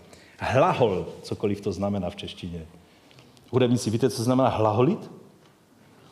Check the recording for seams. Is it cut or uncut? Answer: uncut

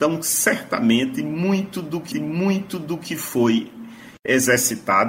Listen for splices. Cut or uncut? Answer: cut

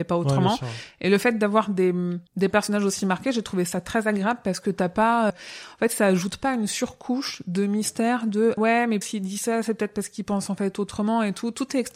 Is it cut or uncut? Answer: cut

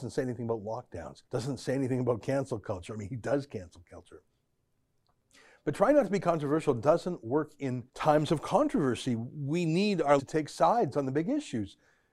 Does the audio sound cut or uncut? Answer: cut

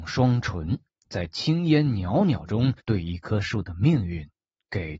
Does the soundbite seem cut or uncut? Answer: cut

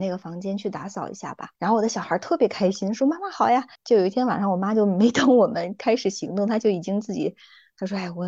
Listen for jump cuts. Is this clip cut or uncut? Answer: cut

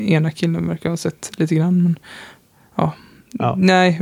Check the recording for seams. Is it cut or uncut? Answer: uncut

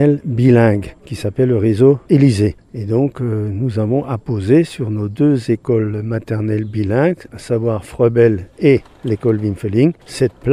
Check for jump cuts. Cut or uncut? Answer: uncut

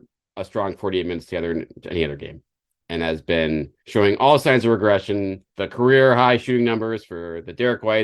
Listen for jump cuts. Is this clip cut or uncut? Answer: cut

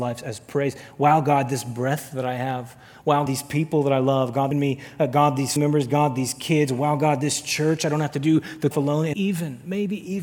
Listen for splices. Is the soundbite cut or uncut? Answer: cut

